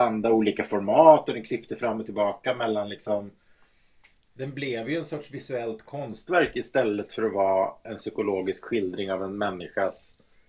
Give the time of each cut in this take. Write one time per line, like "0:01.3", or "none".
none

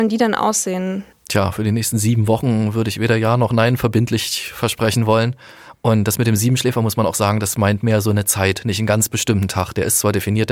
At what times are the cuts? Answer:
none

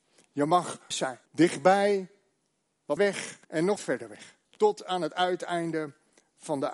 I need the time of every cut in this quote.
0:00.9
0:01.3
0:03.0
0:03.4
0:03.8
0:04.4

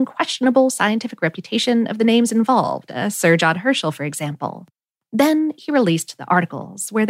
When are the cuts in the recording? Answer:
none

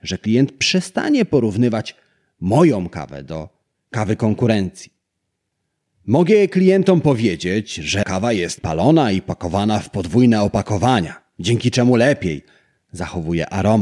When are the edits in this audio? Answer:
0:08.0
0:08.6

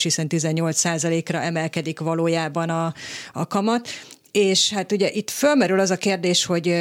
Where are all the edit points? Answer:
none

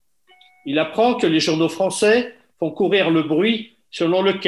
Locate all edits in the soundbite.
none

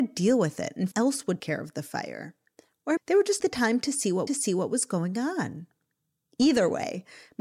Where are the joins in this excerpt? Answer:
0:00.9
0:01.4
0:03.0
0:03.4
0:04.3

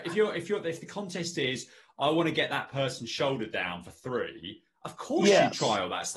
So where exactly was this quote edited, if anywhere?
none

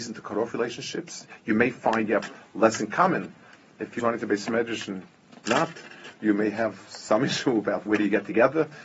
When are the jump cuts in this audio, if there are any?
0:04.0
0:05.5
0:07.9

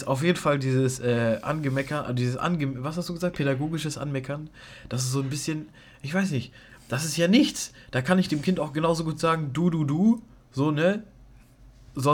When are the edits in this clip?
none

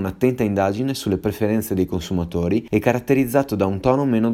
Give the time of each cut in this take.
none

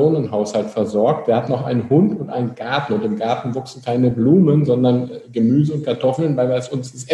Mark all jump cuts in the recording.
none

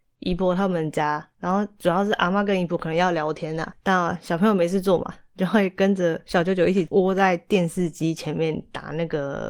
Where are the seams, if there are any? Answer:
none

